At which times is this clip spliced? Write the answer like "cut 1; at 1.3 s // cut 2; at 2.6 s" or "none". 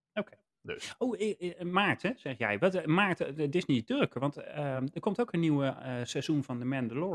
none